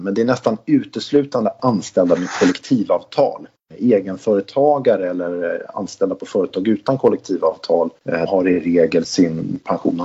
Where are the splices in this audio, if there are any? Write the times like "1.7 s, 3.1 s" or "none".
8.3 s, 9.0 s